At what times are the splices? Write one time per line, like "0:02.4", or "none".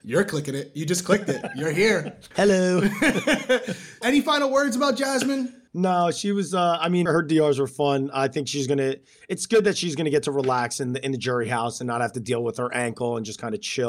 0:02.3
0:04.0
0:05.7
0:07.1

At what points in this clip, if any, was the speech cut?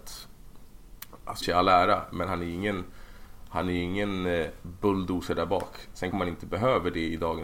0:01.4
0:06.1

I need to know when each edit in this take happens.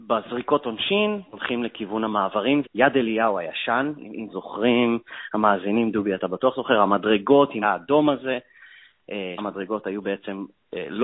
0:01.3
0:02.6
0:04.3
0:07.6
0:09.4

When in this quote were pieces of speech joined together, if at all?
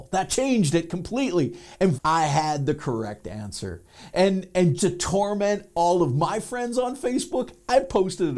0:01.9
0:04.8

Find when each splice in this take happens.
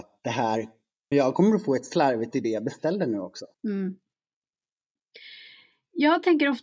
0:01.1
0:02.3
0:03.5

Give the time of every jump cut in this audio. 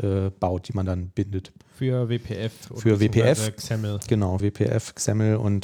0:04.4

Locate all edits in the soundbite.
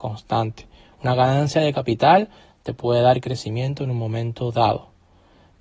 none

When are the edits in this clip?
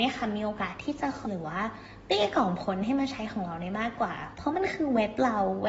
0:01.2

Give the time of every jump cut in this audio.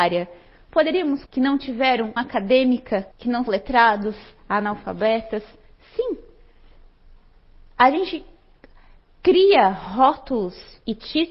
0:01.3
0:02.2
0:03.1
0:03.5

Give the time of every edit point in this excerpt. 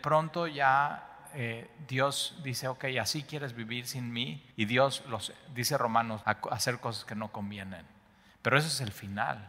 0:04.5
0:06.2

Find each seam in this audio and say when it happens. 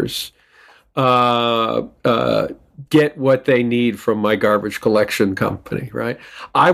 0:02.9

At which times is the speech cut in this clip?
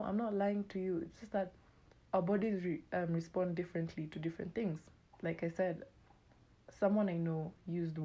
none

